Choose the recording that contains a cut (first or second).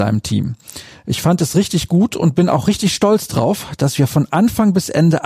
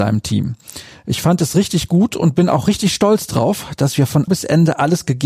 second